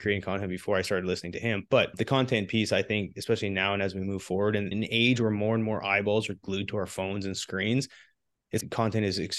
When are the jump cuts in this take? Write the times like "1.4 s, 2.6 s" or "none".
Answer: none